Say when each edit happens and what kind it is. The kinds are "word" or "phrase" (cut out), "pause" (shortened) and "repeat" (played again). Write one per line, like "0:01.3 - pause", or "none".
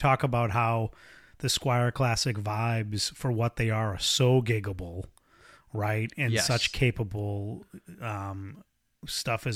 none

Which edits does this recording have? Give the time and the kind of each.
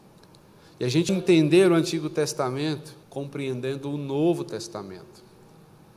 0:01.1 - word
0:03.0 - pause

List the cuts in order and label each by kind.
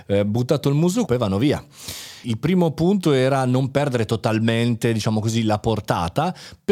0:01.1 - phrase
0:02.2 - word

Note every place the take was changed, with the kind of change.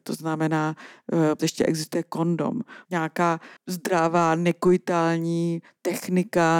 0:01.4 - word
0:02.9 - phrase
0:03.6 - pause

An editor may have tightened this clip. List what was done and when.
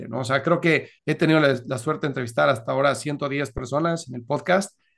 0:01.0 - pause

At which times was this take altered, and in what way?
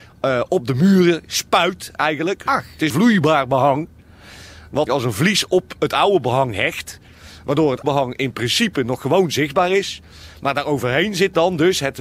0:02.9 - phrase
0:04.9 - word
0:07.8 - word

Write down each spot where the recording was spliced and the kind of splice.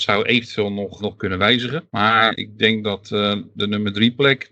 0:01.0 - word

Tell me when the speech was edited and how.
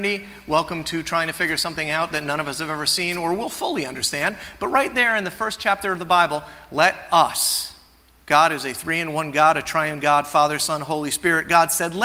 none

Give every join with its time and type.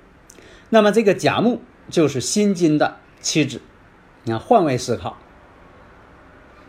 none

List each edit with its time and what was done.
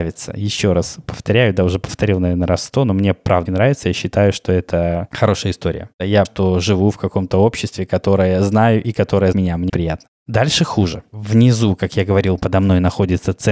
0:03.5 - word
0:05.1 - word
0:06.2 - word
0:09.3 - word
0:09.7 - word
0:12.4 - word

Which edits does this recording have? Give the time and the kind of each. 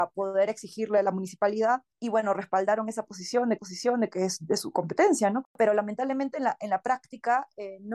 0:01.9 - pause
0:03.6 - repeat
0:05.5 - pause

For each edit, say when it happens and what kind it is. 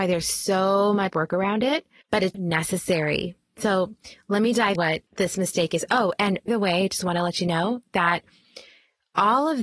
0:01.1 - word
0:02.0 - pause
0:02.3 - word
0:04.8 - word
0:05.1 - pause
0:06.5 - word

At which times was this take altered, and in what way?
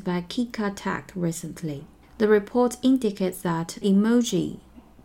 0:02.0 - pause
0:03.8 - word

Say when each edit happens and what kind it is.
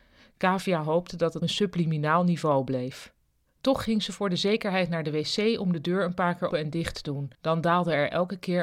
0:01.4 - phrase
0:06.5 - word
0:07.3 - pause

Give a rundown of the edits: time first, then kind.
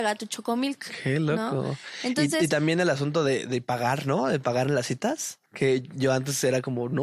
0:05.5 - pause

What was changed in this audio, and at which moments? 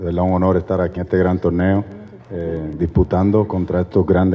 0:01.0 - word
0:02.2 - pause

